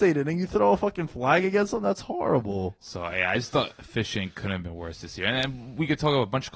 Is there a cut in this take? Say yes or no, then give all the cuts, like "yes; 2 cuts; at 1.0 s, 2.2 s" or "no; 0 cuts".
no; 0 cuts